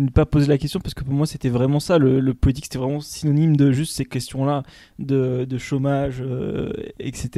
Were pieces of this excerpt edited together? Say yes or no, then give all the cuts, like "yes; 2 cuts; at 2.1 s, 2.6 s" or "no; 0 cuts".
no; 0 cuts